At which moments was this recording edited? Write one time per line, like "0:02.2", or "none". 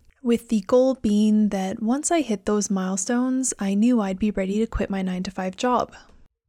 none